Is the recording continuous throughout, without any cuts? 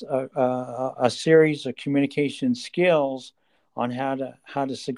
yes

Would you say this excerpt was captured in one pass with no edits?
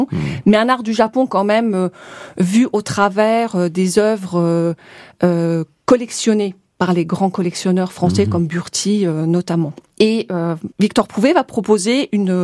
yes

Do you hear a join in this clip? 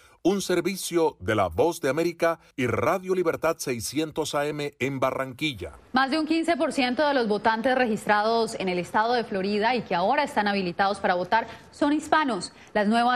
yes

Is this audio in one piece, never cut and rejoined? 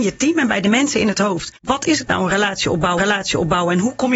no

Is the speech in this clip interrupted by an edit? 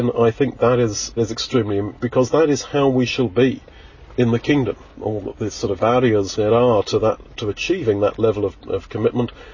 yes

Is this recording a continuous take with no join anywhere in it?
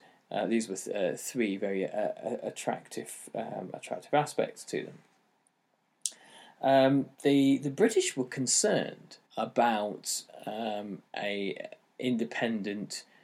no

